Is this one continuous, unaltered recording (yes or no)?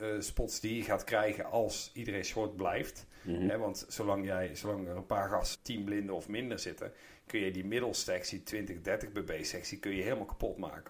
no